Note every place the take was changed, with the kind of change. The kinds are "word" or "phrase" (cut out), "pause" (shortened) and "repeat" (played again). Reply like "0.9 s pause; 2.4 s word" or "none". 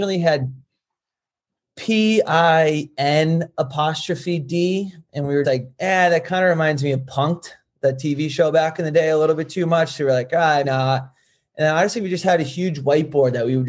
5.4 s word; 10.6 s word